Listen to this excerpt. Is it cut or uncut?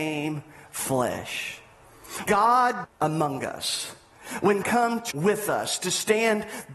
cut